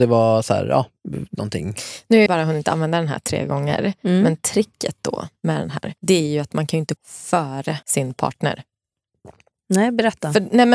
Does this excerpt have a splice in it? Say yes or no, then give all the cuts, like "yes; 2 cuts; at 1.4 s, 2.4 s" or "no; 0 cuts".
yes; 5 cuts; at 1.3 s, 2.3 s, 6.0 s, 7.0 s, 7.8 s